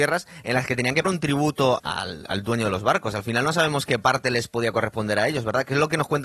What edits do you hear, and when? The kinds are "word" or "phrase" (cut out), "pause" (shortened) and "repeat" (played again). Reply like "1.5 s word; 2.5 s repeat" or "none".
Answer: 1.0 s word; 1.8 s word